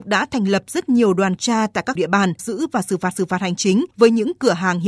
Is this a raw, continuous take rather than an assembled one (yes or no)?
no